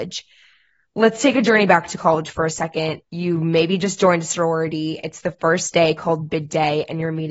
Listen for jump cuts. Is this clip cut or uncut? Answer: cut